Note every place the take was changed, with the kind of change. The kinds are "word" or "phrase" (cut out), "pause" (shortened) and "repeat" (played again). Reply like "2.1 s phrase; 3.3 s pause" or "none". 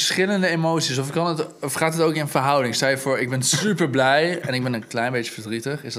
none